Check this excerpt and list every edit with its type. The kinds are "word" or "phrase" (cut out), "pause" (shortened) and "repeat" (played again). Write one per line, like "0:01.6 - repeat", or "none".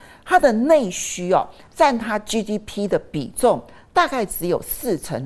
none